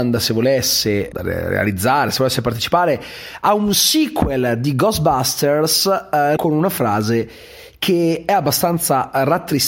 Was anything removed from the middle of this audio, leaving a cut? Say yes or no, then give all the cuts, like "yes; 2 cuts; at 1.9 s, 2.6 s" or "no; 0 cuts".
yes; 2 cuts; at 1.1 s, 6.4 s